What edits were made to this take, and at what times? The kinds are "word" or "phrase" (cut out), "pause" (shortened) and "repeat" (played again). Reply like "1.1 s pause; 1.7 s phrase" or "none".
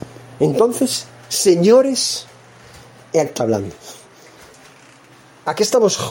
3.4 s word